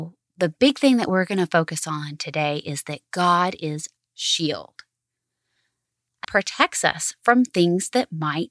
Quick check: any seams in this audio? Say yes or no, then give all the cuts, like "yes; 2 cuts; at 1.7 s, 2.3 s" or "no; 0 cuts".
yes; 2 cuts; at 4.1 s, 6.2 s